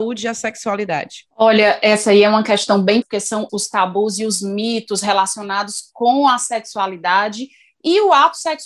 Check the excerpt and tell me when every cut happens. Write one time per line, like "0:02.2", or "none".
0:01.3
0:03.0
0:03.5